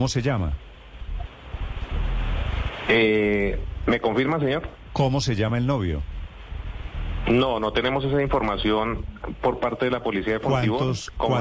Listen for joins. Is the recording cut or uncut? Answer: uncut